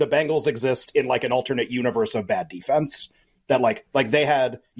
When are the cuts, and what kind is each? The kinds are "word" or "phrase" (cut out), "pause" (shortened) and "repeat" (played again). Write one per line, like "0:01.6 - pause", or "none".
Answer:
none

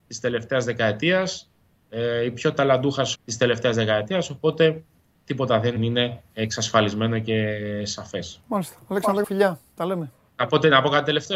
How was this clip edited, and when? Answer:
0:03.2 - word
0:04.9 - pause
0:05.8 - phrase
0:06.3 - pause
0:08.4 - pause
0:09.2 - word

